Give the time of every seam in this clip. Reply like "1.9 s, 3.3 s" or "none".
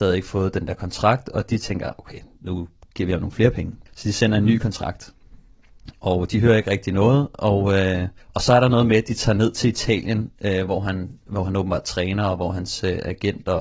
3.9 s, 8.2 s